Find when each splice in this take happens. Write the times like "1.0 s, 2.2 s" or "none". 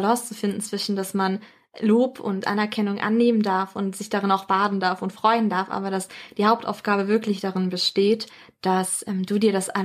none